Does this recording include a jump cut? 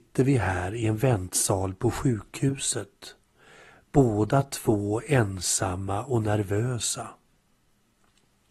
no; 0 cuts

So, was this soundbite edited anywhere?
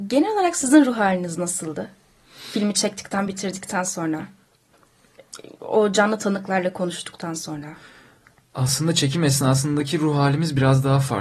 no; 0 cuts

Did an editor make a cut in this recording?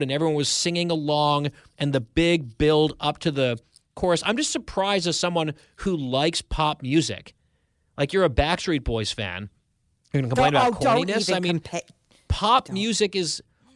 no; 0 cuts

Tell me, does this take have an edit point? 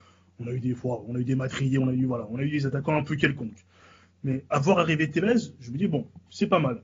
no; 0 cuts

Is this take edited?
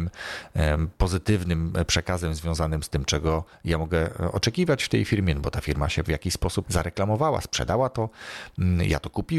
yes; 2 cuts; at 6.0 s, 6.6 s

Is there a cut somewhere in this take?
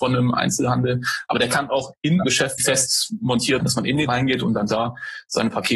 yes; 4 cuts; at 2.2 s, 2.6 s, 3.6 s, 4.1 s

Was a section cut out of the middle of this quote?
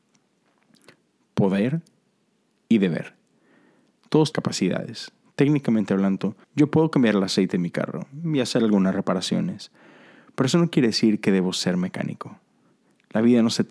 yes; 2 cuts; at 4.3 s, 6.4 s

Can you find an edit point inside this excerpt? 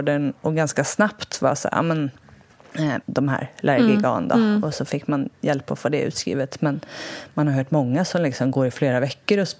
yes; 1 cut; at 3.0 s

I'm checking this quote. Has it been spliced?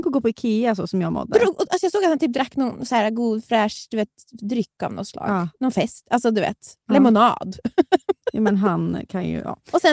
no; 0 cuts

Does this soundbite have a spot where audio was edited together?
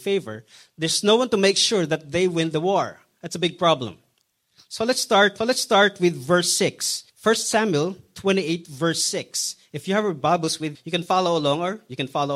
yes; 3 cuts; at 5.4 s, 7.1 s, 10.7 s

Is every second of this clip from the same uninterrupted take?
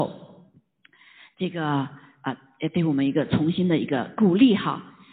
yes; 0 cuts

